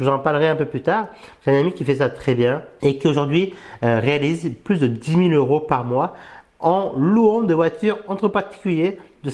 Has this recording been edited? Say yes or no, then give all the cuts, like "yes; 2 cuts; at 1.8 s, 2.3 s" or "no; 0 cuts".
no; 0 cuts